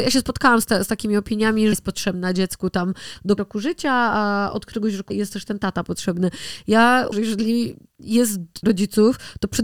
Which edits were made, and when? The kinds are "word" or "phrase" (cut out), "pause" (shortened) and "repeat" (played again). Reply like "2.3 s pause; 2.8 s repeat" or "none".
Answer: 1.7 s phrase; 3.4 s word; 5.1 s word; 7.1 s word; 8.6 s word